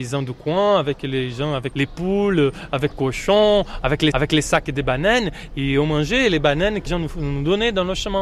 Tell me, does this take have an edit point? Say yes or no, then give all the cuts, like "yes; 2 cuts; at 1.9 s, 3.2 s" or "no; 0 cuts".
yes; 4 cuts; at 1.7 s, 2.9 s, 4.1 s, 6.9 s